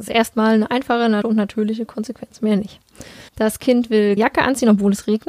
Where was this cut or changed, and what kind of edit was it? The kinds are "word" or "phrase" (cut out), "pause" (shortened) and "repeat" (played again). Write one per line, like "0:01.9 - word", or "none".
0:01.2 - word
0:03.3 - pause
0:04.2 - word